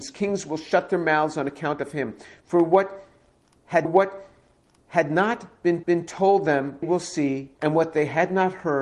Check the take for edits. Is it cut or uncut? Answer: cut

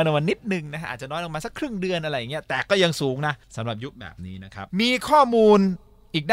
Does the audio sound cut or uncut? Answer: cut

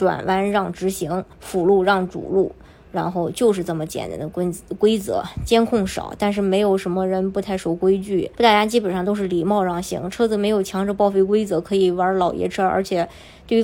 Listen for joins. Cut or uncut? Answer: cut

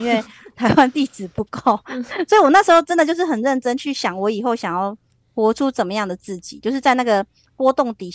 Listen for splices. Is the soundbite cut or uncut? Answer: uncut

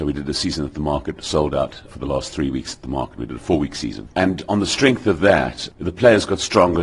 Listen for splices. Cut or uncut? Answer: cut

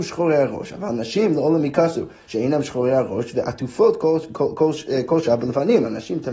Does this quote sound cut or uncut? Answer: uncut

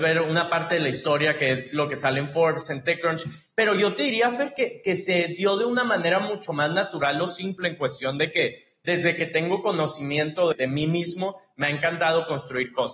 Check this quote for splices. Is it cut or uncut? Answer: cut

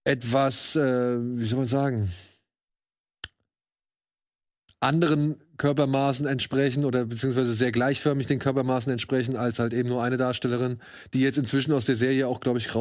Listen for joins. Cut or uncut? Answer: uncut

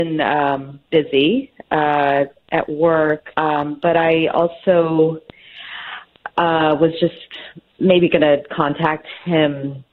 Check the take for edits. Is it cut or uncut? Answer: cut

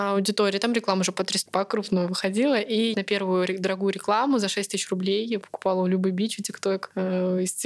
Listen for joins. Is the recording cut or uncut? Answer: cut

